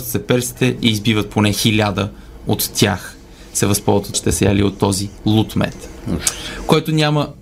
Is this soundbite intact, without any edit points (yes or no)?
no